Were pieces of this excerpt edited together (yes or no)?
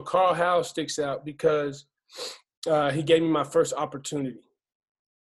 no